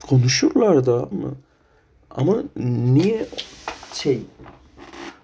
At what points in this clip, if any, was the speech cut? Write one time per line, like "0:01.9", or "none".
0:01.1